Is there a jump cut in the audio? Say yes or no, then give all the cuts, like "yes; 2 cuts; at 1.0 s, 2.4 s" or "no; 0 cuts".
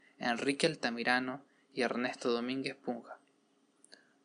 no; 0 cuts